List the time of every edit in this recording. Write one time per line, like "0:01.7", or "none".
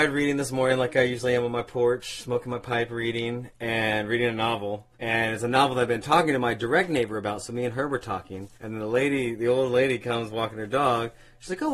0:04.9
0:08.5